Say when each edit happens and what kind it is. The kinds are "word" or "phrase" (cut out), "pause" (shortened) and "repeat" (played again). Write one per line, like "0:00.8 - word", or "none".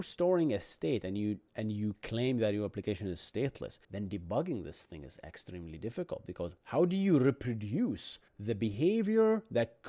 0:01.5 - pause
0:03.8 - pause
0:06.6 - pause
0:08.3 - pause